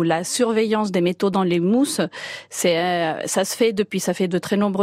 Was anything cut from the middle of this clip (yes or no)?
no